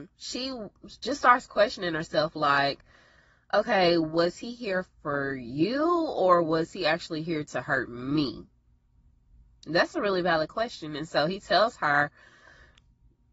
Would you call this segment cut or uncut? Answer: uncut